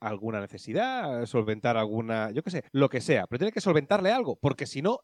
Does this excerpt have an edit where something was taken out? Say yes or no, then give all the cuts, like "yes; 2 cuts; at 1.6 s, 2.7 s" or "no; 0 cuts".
yes; 1 cut; at 2.7 s